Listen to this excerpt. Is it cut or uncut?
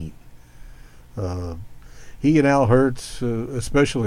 uncut